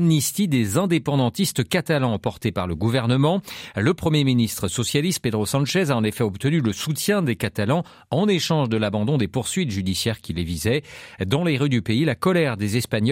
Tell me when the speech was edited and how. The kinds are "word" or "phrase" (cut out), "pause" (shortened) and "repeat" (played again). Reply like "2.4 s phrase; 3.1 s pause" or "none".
none